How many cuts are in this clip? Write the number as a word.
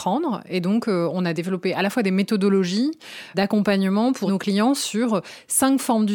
two